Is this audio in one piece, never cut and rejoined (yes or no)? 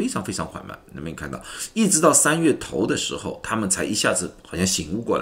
yes